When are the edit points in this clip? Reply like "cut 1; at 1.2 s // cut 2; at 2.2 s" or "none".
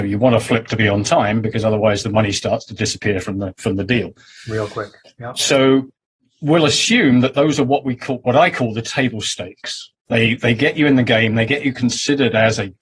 none